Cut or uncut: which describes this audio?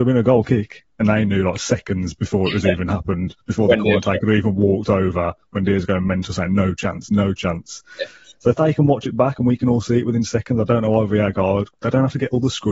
uncut